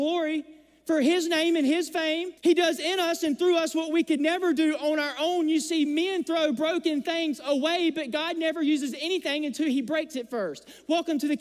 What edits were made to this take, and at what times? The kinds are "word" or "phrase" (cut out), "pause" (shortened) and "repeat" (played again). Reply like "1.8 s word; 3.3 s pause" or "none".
2.4 s pause